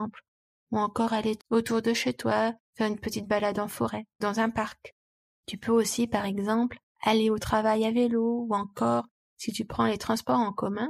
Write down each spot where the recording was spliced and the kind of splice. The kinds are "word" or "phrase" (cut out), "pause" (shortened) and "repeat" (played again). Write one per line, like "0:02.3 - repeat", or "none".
0:01.4 - phrase
0:02.6 - pause
0:04.2 - word